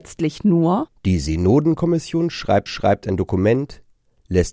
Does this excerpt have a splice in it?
yes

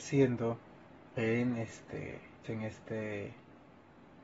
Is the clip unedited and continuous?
no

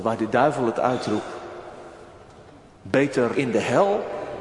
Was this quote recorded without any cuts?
no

